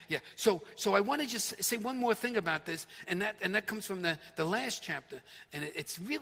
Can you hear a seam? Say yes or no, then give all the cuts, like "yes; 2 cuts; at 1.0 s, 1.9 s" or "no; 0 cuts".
yes; 1 cut; at 3.1 s